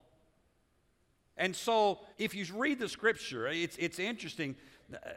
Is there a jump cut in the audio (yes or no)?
yes